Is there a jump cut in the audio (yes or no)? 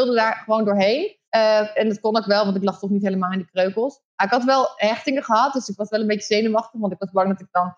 yes